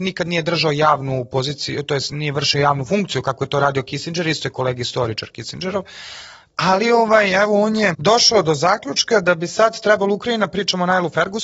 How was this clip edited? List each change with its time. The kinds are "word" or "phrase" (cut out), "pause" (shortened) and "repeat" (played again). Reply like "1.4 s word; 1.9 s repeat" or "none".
7.9 s word